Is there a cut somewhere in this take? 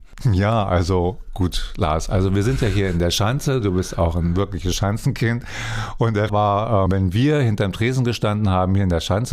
yes; 2 cuts; at 6.3 s, 6.9 s

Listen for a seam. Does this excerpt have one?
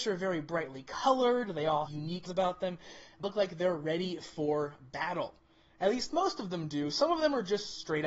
yes; 3 cuts; at 1.9 s, 2.3 s, 3.2 s

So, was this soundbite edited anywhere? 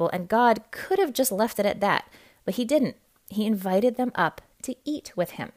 no; 0 cuts

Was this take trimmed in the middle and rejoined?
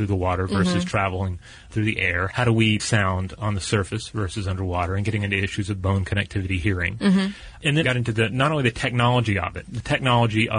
yes; 2 cuts; at 2.8 s, 7.8 s

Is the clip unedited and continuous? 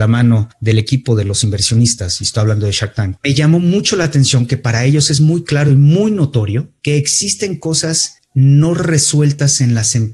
yes; 0 cuts

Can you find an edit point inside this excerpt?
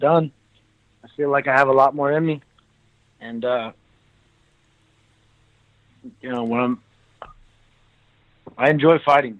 no; 0 cuts

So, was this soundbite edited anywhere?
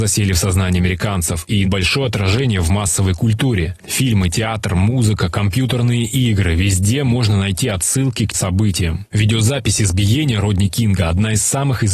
yes; 2 cuts; at 1.6 s, 8.3 s

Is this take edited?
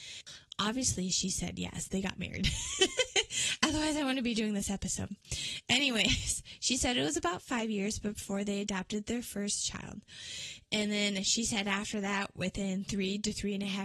no; 0 cuts

